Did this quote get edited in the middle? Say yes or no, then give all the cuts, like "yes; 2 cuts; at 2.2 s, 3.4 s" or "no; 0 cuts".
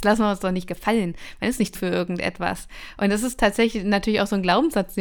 yes; 1 cut; at 1.7 s